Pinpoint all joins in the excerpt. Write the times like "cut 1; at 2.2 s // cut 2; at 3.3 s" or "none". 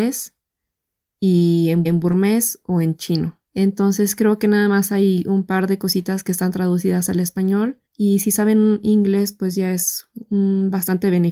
cut 1; at 1.8 s // cut 2; at 3.5 s // cut 3; at 7.9 s